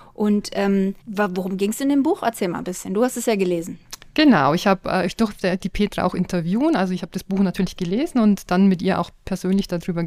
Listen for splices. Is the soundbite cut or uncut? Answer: cut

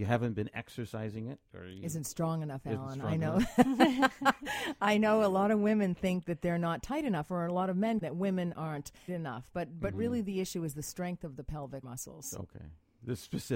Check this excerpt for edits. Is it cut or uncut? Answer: cut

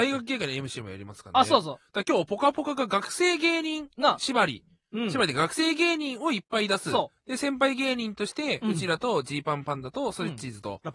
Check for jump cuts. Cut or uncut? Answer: uncut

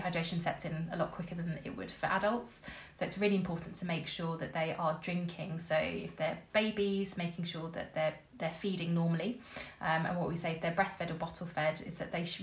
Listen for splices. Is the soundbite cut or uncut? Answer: cut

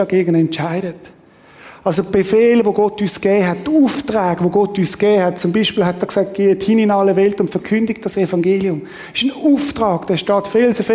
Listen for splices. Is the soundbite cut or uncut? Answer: uncut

